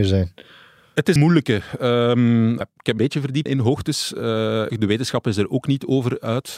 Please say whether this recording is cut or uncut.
cut